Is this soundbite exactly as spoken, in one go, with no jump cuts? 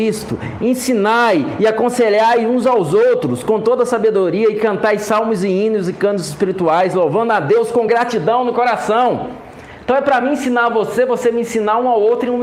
yes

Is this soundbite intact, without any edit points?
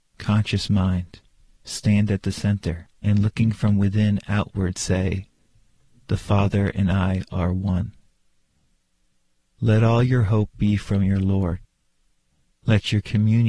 no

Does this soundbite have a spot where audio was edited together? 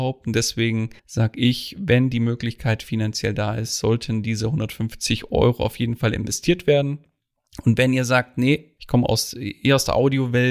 yes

